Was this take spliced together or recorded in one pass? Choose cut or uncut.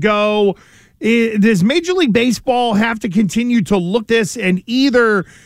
cut